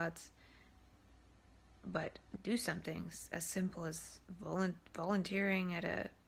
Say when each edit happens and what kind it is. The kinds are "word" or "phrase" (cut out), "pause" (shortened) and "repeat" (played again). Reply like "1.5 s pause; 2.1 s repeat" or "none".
none